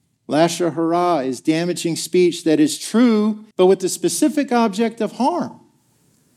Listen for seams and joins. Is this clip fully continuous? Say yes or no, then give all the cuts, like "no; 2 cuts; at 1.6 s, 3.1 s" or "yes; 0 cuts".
no; 1 cut; at 3.5 s